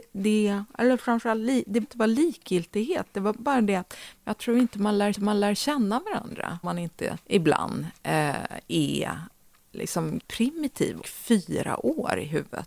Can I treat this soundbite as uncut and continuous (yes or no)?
no